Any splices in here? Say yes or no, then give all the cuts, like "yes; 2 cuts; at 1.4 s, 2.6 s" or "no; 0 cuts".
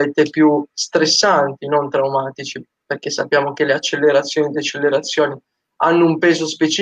no; 0 cuts